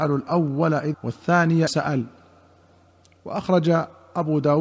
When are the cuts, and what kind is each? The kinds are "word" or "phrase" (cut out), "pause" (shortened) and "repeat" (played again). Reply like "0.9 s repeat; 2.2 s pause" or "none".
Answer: 0.9 s word; 1.7 s word